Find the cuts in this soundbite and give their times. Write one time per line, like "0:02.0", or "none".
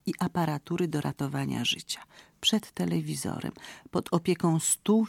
none